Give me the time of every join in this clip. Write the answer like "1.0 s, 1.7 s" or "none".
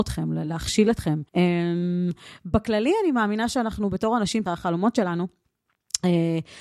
1.3 s, 4.5 s